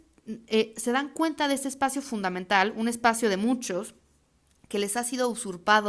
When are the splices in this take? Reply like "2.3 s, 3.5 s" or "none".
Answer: none